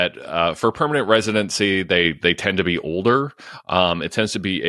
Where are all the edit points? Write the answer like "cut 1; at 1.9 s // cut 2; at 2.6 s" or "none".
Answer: none